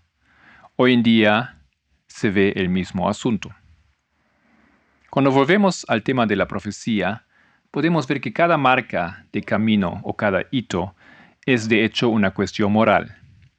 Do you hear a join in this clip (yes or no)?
no